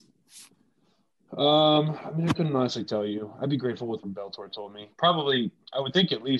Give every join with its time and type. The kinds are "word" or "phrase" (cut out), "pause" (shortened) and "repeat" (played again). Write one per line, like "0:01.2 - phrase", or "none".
0:04.0 - word